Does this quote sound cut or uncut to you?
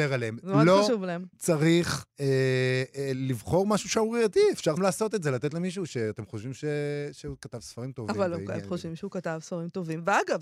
cut